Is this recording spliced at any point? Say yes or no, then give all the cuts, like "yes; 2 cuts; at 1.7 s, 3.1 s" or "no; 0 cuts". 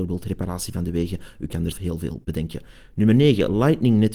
yes; 1 cut; at 1.7 s